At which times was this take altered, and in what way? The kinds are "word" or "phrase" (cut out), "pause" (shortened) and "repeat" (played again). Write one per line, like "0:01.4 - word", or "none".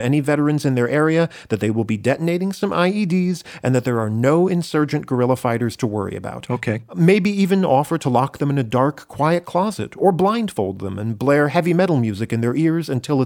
none